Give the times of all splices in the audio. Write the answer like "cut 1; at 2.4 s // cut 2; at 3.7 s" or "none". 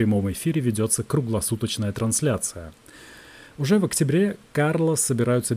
none